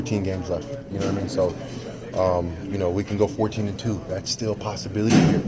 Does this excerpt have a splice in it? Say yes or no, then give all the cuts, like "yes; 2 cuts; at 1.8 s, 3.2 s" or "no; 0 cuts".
no; 0 cuts